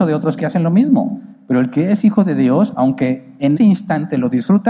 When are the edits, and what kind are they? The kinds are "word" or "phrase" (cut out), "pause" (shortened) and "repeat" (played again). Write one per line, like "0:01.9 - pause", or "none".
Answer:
0:03.6 - word